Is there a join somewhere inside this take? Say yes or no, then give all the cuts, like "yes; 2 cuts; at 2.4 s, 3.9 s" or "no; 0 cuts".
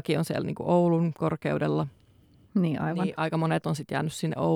no; 0 cuts